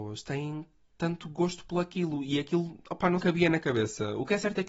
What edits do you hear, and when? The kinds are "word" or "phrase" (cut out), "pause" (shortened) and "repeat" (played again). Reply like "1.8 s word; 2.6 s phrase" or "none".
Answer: 3.2 s phrase